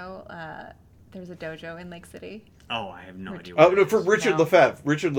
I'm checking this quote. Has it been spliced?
no; 0 cuts

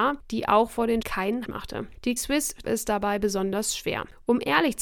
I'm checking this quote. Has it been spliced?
yes; 4 cuts; at 1.0 s, 1.4 s, 2.2 s, 2.6 s

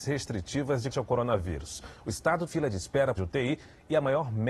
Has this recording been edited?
yes; 3 cuts; at 0.9 s, 2.5 s, 3.2 s

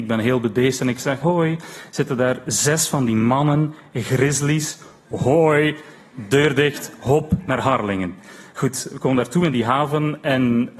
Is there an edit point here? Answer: yes; 1 cut; at 1.2 s

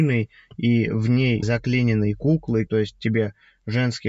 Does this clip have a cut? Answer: yes; 2 cuts; at 1.4 s, 2.7 s

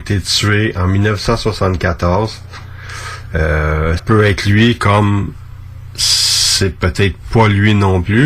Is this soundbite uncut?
no; 1 cut; at 4.0 s

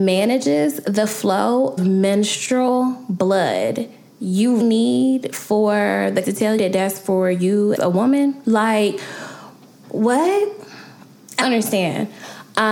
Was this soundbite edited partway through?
yes; 6 cuts; at 1.8 s, 4.6 s, 6.2 s, 6.6 s, 7.7 s, 11.4 s

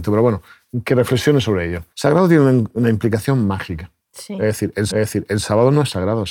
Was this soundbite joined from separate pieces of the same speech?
yes; 3 cuts; at 1.9 s, 4.0 s, 4.9 s

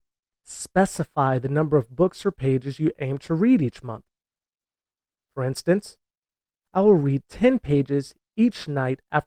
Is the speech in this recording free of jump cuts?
yes; 0 cuts

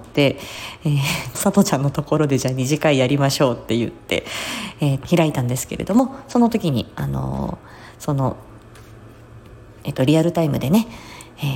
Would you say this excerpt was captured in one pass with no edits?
no; 2 cuts; at 1.3 s, 5.0 s

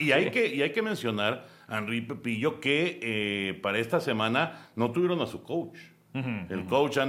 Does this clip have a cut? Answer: no; 0 cuts

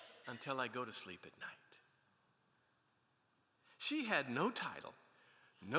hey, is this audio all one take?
yes; 0 cuts

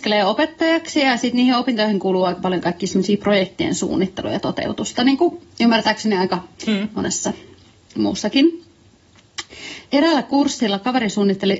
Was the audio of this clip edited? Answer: yes; 1 cut; at 6.5 s

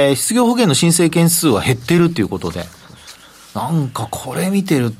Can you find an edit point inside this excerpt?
no; 0 cuts

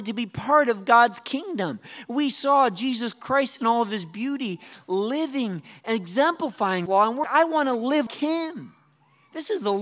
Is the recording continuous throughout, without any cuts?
no; 3 cuts; at 6.9 s, 7.2 s, 8.1 s

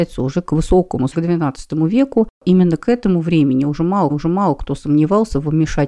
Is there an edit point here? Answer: yes; 2 cuts; at 1.1 s, 4.1 s

